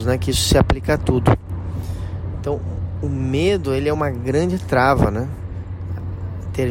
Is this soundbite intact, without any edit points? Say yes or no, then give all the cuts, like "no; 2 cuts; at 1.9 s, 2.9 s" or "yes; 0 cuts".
yes; 0 cuts